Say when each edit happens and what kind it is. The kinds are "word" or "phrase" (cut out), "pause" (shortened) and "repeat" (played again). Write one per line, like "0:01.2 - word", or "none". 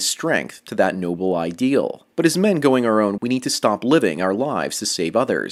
0:02.1 - pause
0:03.2 - word